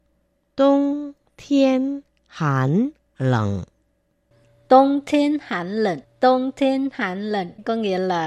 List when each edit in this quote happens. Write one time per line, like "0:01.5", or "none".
0:06.0

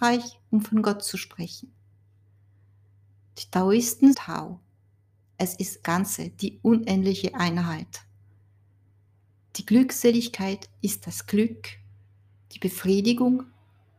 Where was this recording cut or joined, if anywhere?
0:04.1
0:05.8

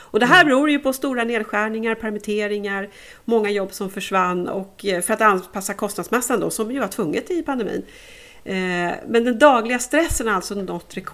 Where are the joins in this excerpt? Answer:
none

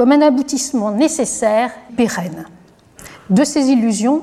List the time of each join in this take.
0:01.9

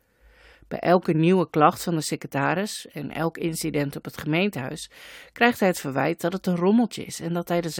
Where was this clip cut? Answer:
none

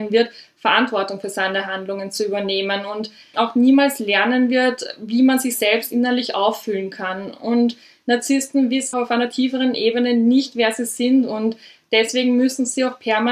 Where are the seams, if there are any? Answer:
0:03.3
0:08.9

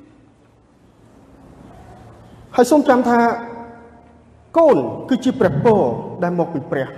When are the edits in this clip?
none

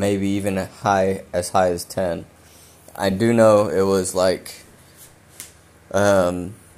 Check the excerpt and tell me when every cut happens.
none

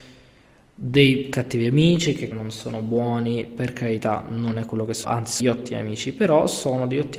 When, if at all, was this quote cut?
0:02.3
0:05.0
0:05.4

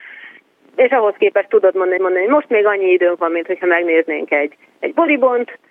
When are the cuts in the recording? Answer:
0:02.0

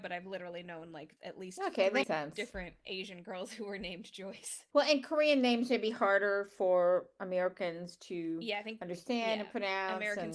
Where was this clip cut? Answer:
0:02.0

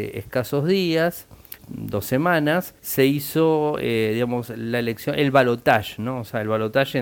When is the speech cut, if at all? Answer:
0:01.6
0:02.8

